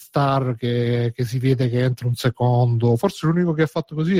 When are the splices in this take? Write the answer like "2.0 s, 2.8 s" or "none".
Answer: none